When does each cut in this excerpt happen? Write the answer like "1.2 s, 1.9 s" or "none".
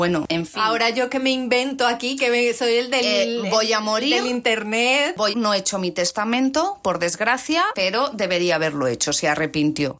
5.3 s